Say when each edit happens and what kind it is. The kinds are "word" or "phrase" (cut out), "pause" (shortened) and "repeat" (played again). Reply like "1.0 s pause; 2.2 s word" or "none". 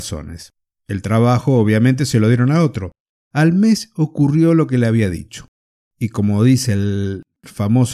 3.1 s pause; 5.6 s pause